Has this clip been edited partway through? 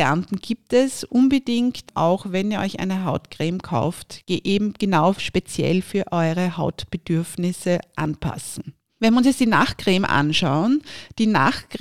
yes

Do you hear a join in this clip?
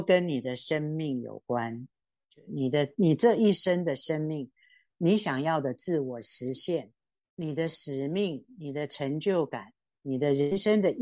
no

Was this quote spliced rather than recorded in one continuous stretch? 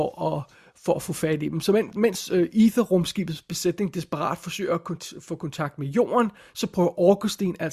no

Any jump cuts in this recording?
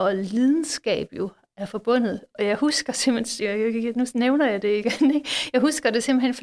no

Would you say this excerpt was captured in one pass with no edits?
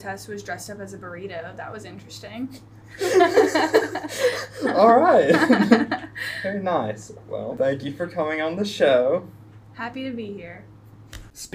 yes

